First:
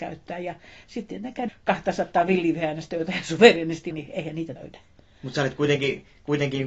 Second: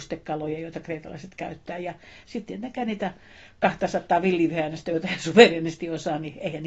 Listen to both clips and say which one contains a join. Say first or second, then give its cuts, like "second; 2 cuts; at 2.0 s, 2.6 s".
first; 3 cuts; at 1.5 s, 3.9 s, 4.6 s